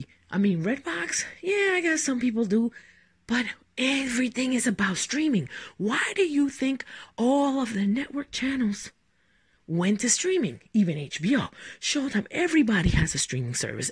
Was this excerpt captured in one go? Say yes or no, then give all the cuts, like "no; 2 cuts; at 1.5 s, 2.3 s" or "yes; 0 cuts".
yes; 0 cuts